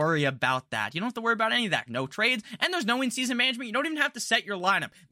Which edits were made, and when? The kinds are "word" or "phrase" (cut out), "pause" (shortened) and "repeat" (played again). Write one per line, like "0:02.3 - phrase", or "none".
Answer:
0:01.9 - phrase